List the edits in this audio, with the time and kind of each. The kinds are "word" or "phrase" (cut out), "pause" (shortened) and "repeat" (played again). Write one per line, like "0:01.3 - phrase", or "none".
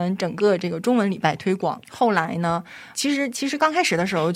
0:01.8 - pause
0:02.9 - word